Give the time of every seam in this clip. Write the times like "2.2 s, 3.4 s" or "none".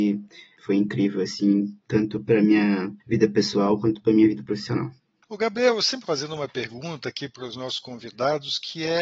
1.8 s, 3.0 s, 5.1 s, 6.1 s